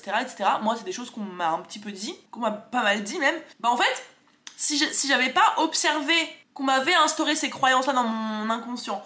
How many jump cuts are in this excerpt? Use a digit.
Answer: 3